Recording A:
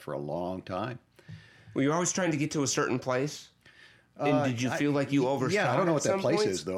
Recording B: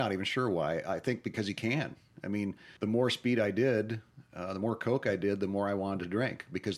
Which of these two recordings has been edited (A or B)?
B